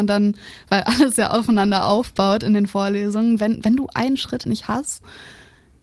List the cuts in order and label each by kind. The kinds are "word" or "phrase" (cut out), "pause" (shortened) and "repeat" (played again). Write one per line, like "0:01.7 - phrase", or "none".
0:04.4 - word